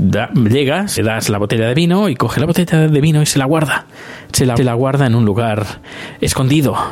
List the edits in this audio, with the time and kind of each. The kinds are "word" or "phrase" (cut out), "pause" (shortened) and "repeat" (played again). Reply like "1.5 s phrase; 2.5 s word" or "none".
1.0 s word; 4.6 s repeat